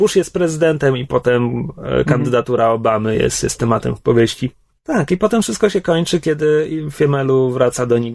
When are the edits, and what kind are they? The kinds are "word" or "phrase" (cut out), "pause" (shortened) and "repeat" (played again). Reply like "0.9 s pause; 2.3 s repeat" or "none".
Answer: none